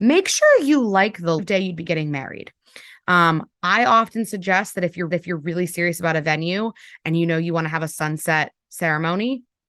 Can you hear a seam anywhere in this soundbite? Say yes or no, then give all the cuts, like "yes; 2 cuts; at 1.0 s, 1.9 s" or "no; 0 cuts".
yes; 2 cuts; at 1.4 s, 5.1 s